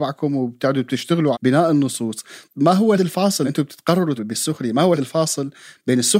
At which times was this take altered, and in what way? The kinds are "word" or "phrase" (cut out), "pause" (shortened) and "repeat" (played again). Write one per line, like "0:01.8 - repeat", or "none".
0:01.3 - word
0:02.5 - word
0:03.0 - word
0:03.4 - word
0:04.2 - word
0:05.0 - word